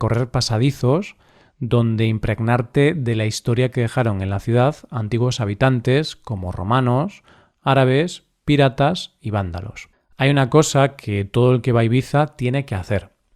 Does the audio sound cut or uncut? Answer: cut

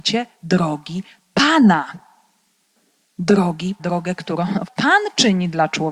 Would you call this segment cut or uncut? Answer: cut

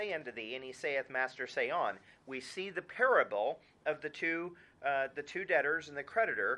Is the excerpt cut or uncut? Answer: uncut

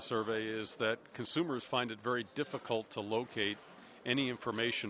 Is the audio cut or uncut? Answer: uncut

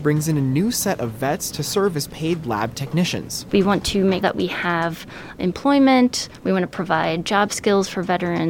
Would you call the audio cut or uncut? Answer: cut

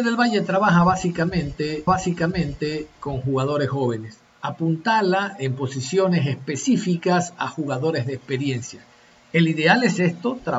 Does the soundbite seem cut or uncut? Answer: cut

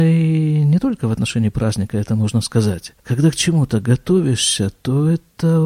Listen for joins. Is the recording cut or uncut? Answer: cut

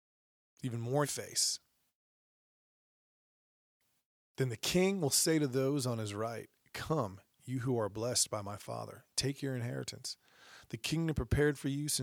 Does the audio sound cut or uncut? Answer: cut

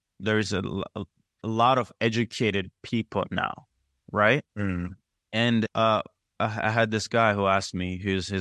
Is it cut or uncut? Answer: cut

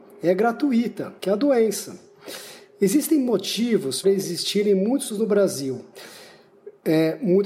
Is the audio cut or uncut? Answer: cut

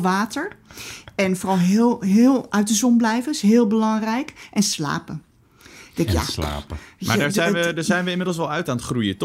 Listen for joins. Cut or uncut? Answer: uncut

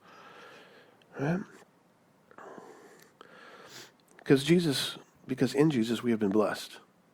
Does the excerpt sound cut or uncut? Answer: cut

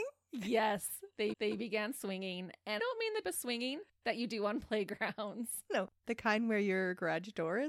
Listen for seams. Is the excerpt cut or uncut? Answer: cut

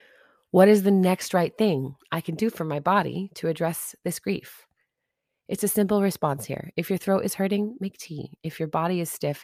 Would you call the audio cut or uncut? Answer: uncut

